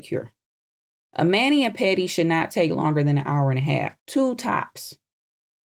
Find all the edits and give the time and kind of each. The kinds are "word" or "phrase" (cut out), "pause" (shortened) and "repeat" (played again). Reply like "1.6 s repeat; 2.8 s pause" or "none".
4.0 s pause